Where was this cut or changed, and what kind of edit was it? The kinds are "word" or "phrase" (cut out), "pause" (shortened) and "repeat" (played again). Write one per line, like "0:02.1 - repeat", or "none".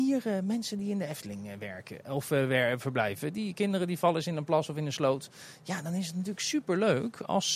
none